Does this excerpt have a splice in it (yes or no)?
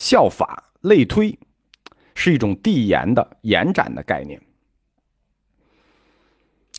no